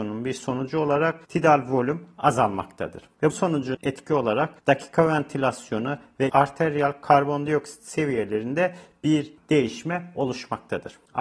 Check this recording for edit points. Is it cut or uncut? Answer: cut